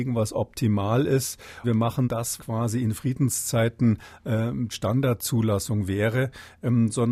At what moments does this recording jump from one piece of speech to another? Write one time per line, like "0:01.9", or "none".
0:01.6
0:02.0
0:02.4
0:04.7